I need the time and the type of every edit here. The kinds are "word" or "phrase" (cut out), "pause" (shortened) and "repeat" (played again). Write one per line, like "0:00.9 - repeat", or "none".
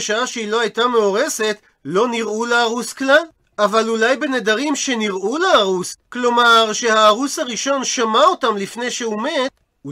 none